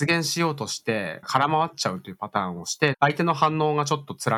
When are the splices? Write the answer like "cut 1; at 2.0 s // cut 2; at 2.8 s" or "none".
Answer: cut 1; at 2.9 s